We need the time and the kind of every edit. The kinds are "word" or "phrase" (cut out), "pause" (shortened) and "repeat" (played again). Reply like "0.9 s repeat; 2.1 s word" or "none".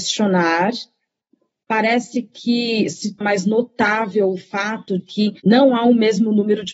3.2 s word; 5.0 s word; 5.4 s pause